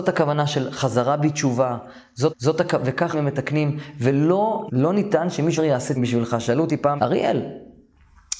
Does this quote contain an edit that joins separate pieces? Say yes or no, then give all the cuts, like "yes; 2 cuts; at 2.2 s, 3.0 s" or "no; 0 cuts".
yes; 6 cuts; at 2.3 s, 3.1 s, 4.7 s, 5.6 s, 6.0 s, 7.0 s